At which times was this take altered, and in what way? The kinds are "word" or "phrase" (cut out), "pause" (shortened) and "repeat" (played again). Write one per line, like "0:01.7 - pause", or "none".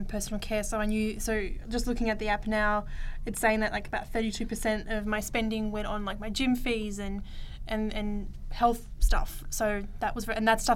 none